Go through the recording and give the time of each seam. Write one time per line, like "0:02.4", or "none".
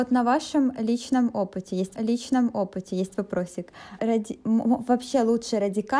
0:02.0
0:04.0